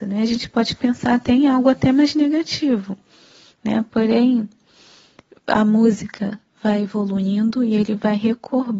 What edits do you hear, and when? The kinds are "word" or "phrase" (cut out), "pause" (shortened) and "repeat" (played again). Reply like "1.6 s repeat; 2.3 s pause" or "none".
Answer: none